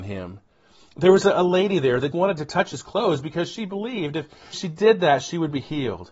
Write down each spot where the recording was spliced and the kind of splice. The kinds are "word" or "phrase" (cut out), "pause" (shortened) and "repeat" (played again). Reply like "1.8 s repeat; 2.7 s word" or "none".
2.1 s word; 4.5 s word

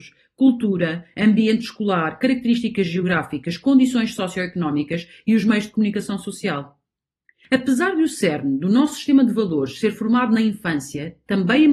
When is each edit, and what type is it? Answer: none

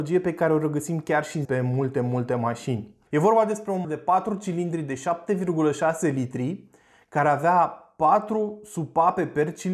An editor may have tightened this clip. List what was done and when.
1.4 s phrase; 3.1 s pause; 3.8 s word

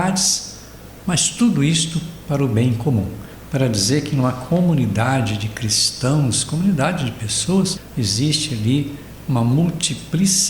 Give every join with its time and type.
none

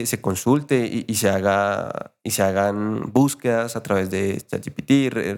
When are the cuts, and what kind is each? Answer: none

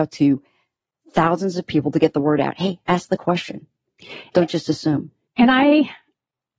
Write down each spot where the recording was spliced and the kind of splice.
5.2 s pause

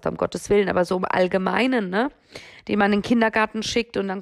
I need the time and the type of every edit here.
none

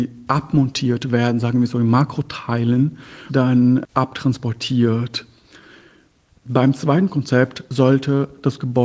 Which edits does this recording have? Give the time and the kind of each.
3.3 s phrase

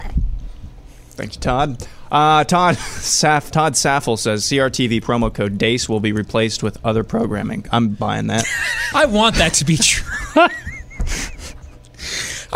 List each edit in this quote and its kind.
3.5 s word; 8.9 s word

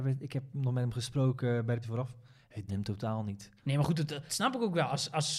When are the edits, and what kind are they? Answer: 1.8 s word; 2.7 s word; 3.6 s pause; 4.3 s word

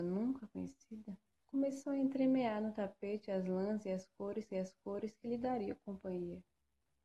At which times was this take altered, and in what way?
1.3 s pause; 4.5 s repeat

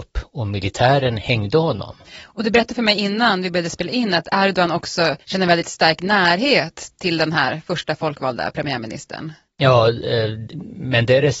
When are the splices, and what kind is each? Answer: 5.2 s pause

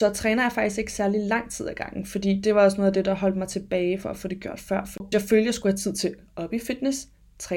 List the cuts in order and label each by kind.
5.1 s word

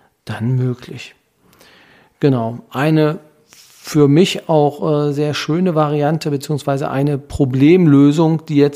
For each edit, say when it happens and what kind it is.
none

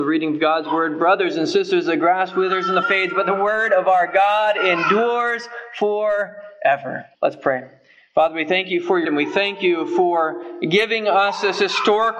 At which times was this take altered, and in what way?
2.8 s word; 7.1 s pause; 9.0 s word

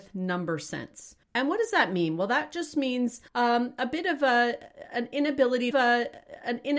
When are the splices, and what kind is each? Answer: 1.2 s pause; 3.3 s pause; 5.7 s repeat

